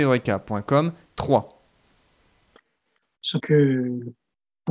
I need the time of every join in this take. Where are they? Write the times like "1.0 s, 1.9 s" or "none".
1.1 s, 3.4 s